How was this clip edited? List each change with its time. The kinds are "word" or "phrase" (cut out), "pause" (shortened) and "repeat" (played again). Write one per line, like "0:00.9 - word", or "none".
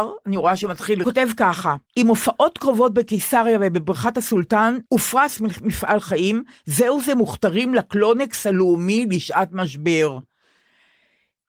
0:01.0 - phrase
0:01.9 - pause
0:04.9 - pause